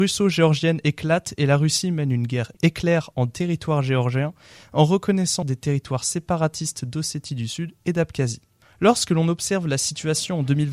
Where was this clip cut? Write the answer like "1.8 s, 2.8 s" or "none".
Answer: 5.4 s, 8.6 s